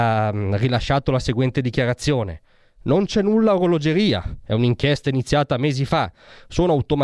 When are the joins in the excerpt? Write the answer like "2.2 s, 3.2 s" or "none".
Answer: none